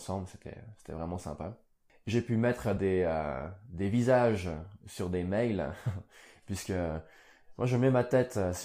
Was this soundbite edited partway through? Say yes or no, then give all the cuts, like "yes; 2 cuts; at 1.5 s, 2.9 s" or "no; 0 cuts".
no; 0 cuts